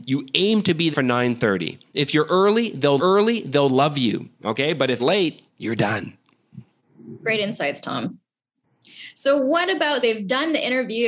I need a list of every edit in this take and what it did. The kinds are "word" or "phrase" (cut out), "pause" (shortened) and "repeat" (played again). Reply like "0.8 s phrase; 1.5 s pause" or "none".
0.9 s word; 3.0 s repeat; 5.0 s word; 5.5 s pause; 10.0 s word